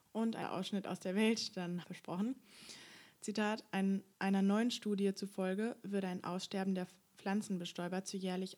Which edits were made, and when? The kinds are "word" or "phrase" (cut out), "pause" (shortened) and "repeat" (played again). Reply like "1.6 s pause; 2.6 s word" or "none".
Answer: 1.8 s phrase; 4.1 s pause